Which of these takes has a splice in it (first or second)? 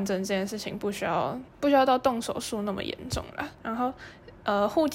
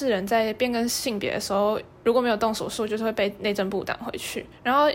first